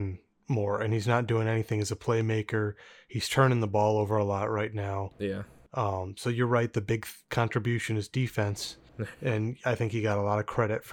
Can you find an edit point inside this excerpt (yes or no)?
no